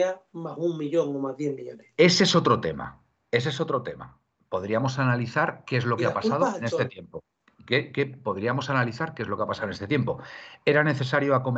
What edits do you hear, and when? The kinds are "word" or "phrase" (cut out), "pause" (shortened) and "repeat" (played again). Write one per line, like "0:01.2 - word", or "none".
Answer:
none